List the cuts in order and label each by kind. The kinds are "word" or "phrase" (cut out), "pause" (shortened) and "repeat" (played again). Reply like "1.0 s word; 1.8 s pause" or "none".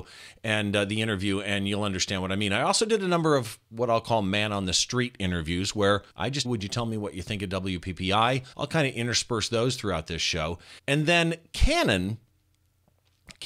6.1 s pause; 6.4 s phrase; 8.5 s pause; 10.8 s pause

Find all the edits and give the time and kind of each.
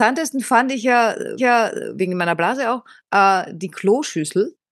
1.4 s repeat

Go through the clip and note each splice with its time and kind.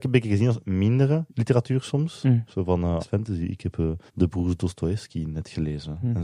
1.3 s pause; 3.0 s word; 4.1 s pause

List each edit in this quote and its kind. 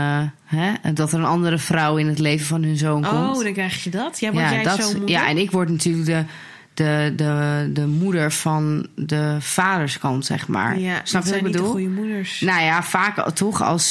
none

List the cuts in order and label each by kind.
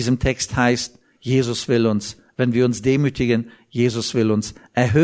none

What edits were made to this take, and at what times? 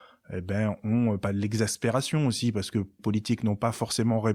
3.0 s word

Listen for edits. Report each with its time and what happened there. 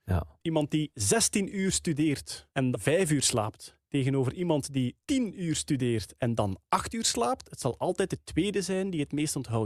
2.7 s word; 3.9 s pause; 5.0 s pause

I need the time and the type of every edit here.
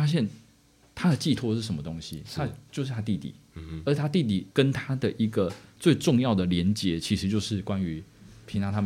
4.5 s pause

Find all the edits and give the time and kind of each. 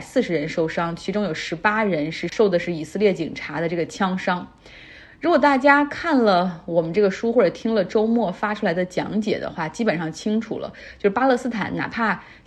none

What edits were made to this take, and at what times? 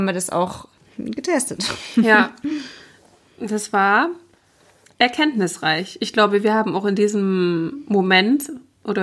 none

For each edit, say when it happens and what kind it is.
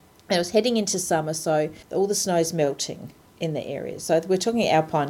1.8 s pause

